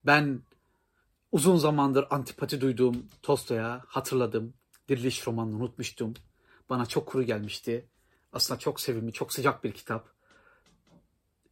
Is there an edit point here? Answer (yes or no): no